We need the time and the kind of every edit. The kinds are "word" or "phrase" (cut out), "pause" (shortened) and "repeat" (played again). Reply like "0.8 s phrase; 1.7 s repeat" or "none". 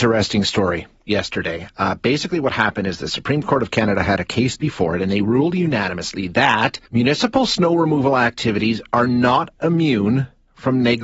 6.9 s pause